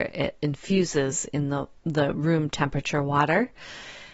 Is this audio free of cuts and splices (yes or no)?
no